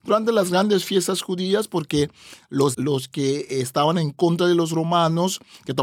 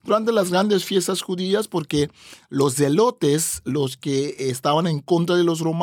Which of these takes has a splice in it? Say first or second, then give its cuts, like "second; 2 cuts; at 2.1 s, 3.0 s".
first; 1 cut; at 2.7 s